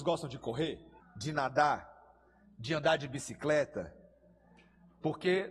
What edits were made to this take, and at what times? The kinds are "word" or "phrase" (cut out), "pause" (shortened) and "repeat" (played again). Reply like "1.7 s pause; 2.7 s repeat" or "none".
1.0 s pause